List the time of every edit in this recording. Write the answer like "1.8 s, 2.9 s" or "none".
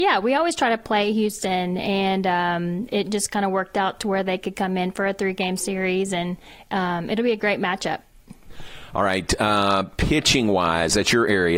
none

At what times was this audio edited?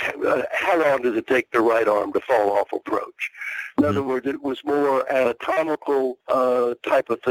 6.2 s

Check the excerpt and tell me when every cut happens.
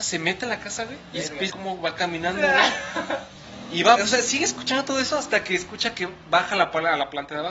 1.5 s, 4.0 s

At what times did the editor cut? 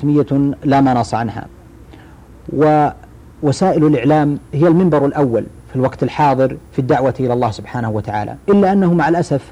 5.6 s, 6.7 s, 8.4 s

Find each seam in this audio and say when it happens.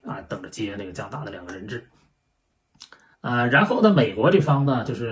3.1 s

